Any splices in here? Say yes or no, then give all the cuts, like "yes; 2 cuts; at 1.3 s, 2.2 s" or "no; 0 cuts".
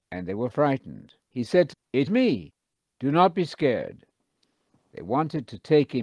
yes; 3 cuts; at 1.2 s, 1.7 s, 2.1 s